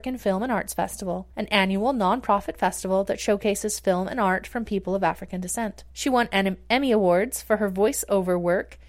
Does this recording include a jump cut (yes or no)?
yes